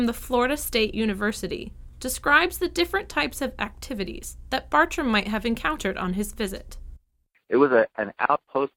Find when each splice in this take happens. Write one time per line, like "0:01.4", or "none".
none